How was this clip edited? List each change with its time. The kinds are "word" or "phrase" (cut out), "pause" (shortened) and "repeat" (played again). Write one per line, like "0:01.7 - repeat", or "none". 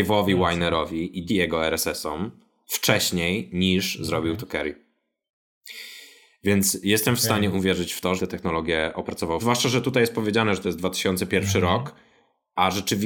0:01.3 - word
0:08.2 - phrase
0:09.4 - word